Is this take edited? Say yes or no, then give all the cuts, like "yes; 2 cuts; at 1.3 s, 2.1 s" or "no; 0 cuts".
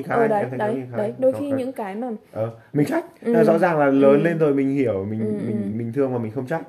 yes; 2 cuts; at 2.9 s, 5.7 s